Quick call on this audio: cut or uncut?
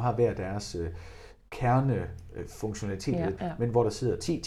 cut